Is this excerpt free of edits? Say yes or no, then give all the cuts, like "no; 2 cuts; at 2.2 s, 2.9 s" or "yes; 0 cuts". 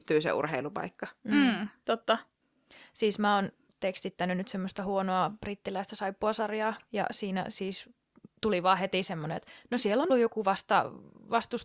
no; 2 cuts; at 3.7 s, 10.1 s